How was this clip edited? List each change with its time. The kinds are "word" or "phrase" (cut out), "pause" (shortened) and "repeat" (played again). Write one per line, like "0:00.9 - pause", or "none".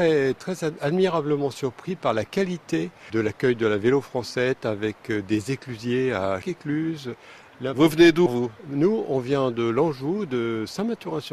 0:03.1 - word
0:06.4 - word
0:08.3 - word